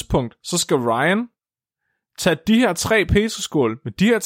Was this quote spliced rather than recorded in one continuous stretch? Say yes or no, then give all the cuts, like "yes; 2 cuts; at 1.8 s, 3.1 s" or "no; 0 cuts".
no; 0 cuts